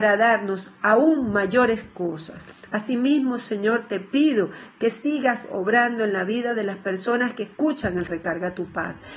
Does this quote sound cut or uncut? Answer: uncut